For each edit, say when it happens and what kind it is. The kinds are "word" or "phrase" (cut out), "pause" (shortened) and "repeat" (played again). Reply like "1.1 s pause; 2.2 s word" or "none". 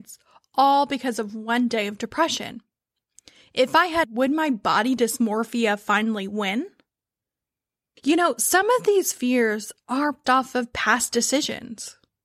4.0 s word; 10.2 s word